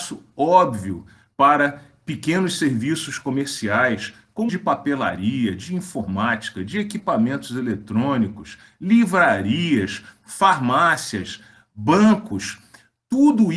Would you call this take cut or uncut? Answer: cut